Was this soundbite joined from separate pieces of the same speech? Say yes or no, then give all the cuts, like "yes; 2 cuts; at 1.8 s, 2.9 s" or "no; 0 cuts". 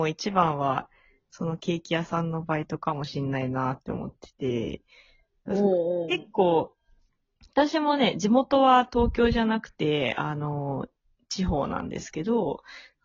no; 0 cuts